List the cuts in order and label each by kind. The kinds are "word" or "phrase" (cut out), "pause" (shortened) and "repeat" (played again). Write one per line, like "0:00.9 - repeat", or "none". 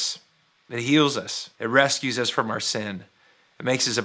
0:01.5 - pause